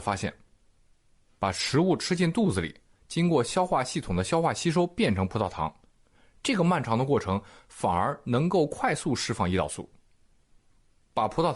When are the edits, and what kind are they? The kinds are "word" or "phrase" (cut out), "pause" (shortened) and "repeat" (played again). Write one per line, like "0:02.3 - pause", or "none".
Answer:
none